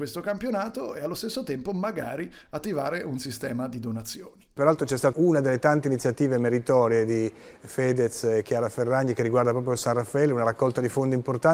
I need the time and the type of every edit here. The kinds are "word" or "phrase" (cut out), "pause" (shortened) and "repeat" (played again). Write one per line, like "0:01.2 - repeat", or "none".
0:05.1 - word